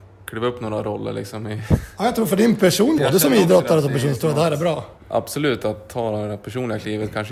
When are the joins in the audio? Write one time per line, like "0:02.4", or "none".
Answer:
0:03.0
0:05.0